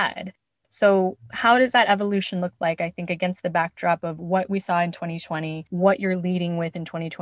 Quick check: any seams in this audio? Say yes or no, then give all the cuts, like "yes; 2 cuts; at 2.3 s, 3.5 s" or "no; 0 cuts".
no; 0 cuts